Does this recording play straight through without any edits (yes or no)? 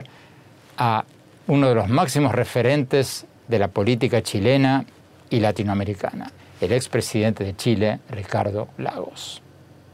no